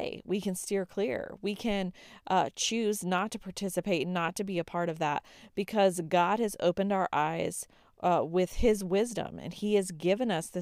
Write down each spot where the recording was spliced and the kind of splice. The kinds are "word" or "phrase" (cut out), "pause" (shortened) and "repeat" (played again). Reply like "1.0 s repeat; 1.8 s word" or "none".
none